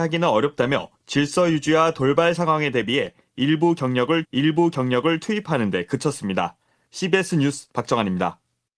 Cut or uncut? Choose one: cut